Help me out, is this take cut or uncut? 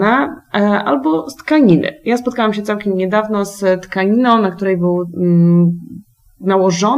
uncut